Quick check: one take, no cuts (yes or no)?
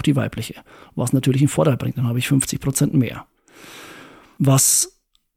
yes